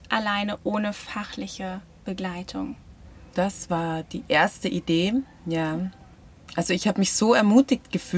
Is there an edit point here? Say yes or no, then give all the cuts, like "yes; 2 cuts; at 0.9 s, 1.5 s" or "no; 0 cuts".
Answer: no; 0 cuts